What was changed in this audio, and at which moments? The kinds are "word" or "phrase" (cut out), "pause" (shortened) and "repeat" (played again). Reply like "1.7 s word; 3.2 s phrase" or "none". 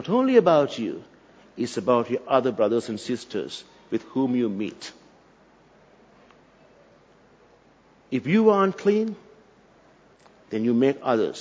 none

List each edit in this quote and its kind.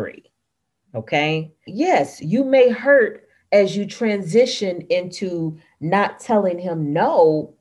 1.7 s word

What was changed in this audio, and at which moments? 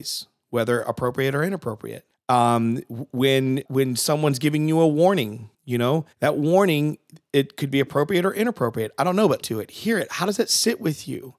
2.1 s pause; 3.7 s word; 5.5 s pause; 6.1 s pause; 9.4 s word

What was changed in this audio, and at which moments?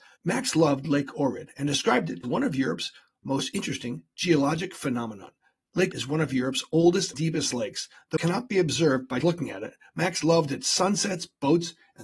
2.2 s word; 5.9 s word; 7.1 s word; 8.2 s word; 9.2 s word

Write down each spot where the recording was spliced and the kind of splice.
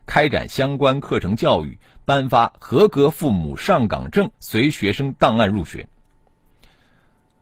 4.3 s pause

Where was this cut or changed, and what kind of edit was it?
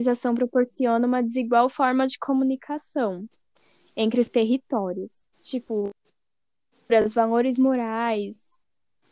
5.3 s pause

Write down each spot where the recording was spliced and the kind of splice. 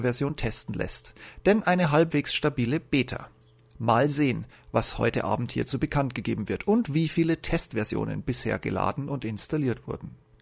none

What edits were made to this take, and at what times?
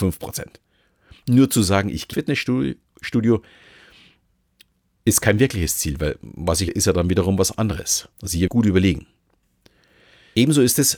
2.1 s word; 6.7 s phrase; 8.1 s pause; 8.5 s word

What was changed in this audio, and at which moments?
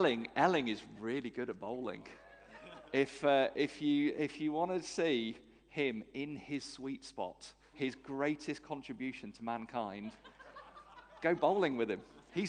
7.7 s word

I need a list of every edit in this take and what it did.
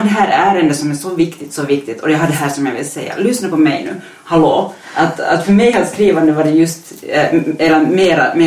none

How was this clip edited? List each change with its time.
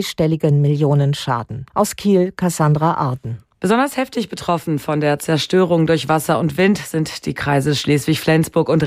1.7 s pause; 3.5 s pause

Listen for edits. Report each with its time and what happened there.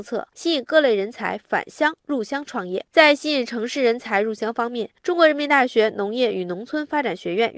5.0 s pause

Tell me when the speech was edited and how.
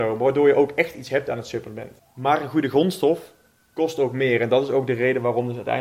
none

